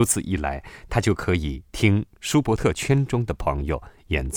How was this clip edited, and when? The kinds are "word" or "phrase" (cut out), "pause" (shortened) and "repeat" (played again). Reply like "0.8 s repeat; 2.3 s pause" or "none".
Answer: 1.7 s pause